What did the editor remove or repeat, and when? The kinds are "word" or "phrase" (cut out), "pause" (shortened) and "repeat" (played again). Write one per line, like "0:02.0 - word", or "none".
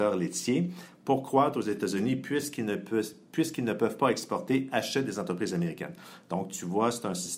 none